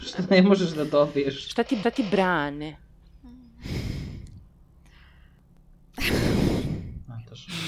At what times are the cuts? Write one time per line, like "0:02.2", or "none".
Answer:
0:01.8

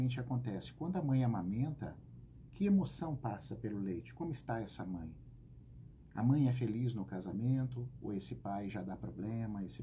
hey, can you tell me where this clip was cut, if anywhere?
none

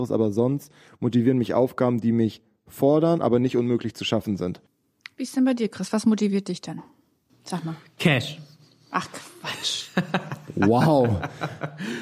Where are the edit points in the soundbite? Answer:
none

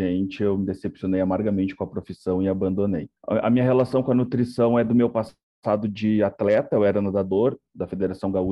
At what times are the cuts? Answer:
0:03.2

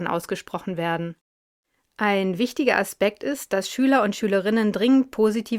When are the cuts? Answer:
none

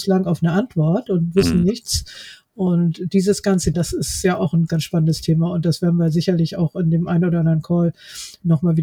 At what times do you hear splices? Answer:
0:03.7
0:04.7

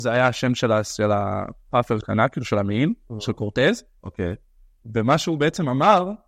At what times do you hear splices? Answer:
0:02.0

